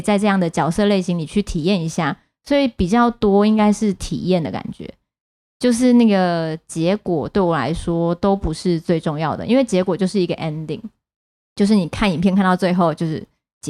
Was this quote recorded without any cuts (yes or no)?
yes